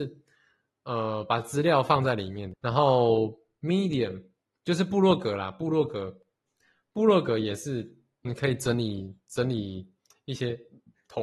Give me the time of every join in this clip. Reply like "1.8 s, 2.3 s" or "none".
2.5 s, 4.4 s, 8.2 s